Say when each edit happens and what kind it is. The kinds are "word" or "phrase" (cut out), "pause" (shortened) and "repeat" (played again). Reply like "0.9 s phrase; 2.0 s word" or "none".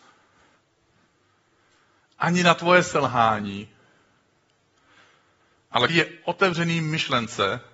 5.9 s word